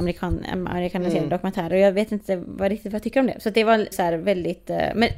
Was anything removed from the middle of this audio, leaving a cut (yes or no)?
yes